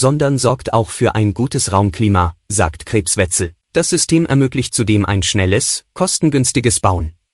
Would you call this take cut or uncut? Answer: cut